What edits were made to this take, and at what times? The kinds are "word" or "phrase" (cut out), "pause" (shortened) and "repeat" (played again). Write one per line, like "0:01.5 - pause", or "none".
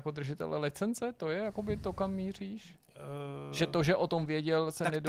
none